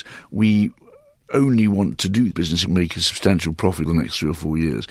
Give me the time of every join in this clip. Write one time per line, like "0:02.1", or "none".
0:02.3
0:02.7
0:03.9

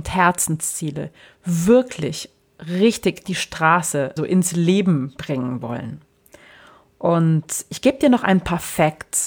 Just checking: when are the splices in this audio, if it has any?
0:03.2
0:04.2

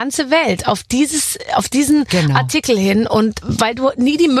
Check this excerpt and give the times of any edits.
0:03.4

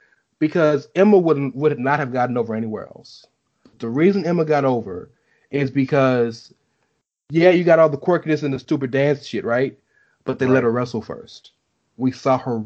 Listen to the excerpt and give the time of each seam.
none

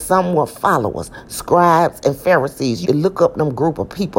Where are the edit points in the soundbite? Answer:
0:02.8

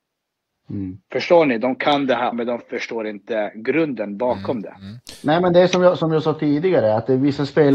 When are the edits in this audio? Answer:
0:02.3

